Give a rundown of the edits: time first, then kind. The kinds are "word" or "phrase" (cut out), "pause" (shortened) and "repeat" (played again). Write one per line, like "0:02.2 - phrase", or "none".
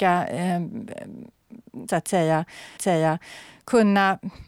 0:01.9 - word
0:02.8 - repeat